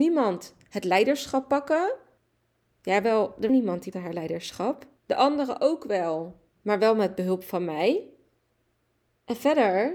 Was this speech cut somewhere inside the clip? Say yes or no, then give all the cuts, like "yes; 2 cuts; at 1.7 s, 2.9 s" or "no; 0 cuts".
yes; 5 cuts; at 2.2 s, 3.5 s, 3.9 s, 5.0 s, 6.5 s